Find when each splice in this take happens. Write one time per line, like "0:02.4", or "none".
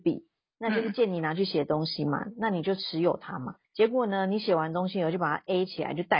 0:03.6